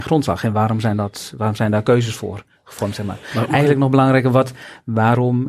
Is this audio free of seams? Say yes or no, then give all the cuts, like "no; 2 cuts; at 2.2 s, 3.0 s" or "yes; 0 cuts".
yes; 0 cuts